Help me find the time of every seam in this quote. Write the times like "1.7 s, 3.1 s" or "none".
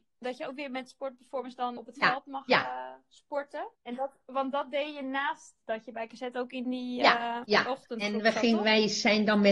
1.8 s, 3.7 s, 7.4 s